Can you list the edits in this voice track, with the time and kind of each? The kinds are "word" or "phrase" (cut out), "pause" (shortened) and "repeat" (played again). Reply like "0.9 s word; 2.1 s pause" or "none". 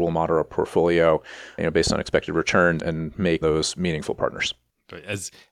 1.6 s word; 2.8 s word; 3.4 s phrase